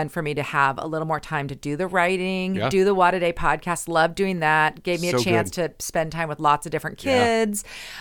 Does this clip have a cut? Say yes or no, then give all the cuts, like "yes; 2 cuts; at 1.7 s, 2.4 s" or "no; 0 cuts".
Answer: no; 0 cuts